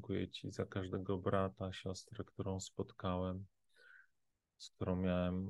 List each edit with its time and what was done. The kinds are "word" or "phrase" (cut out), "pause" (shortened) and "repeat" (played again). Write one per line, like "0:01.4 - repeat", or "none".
none